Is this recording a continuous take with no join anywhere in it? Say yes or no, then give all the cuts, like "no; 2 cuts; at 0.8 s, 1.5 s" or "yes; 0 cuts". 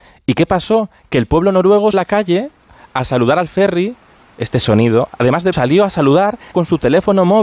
no; 3 cuts; at 1.9 s, 5.5 s, 6.5 s